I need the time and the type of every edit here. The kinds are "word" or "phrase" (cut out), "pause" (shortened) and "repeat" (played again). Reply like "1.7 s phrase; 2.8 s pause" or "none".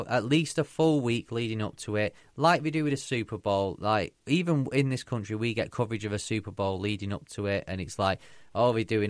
none